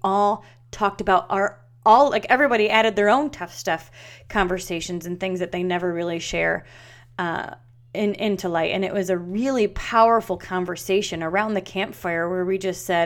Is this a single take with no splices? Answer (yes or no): yes